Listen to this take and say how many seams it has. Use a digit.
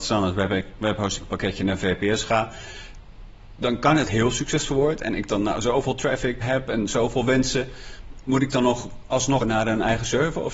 3